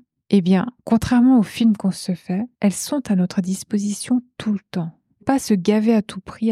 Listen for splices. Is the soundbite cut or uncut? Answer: cut